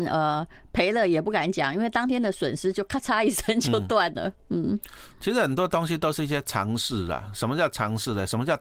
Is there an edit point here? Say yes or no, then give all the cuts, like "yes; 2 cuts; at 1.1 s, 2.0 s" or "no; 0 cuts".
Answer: no; 0 cuts